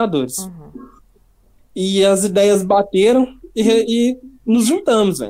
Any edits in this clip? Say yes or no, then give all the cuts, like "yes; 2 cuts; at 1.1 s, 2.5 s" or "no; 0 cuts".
no; 0 cuts